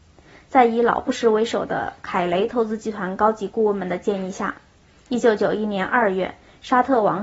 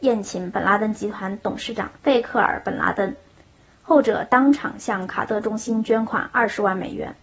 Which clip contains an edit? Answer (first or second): second